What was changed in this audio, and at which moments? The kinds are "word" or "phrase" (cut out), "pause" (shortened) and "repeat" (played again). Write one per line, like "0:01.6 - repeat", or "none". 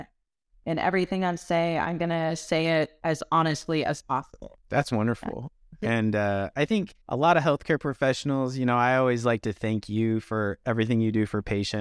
0:07.0 - pause